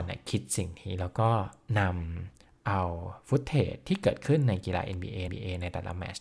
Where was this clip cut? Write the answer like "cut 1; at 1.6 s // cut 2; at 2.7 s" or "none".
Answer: cut 1; at 5.3 s